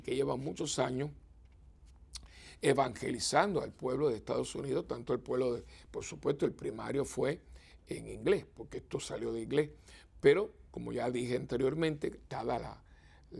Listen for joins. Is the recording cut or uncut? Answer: uncut